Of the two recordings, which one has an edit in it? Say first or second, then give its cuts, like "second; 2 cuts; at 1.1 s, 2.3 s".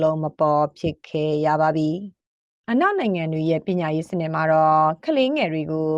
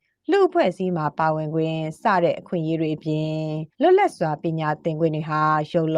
second; 1 cut; at 3.7 s